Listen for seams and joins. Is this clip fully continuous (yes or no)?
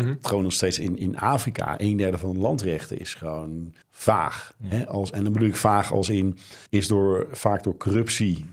no